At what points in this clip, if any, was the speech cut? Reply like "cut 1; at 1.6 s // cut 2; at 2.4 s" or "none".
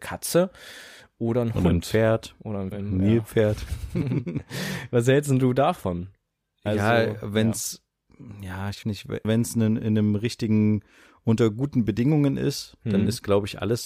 cut 1; at 2.7 s // cut 2; at 8.8 s // cut 3; at 9.2 s